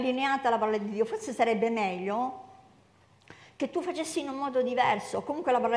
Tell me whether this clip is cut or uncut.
uncut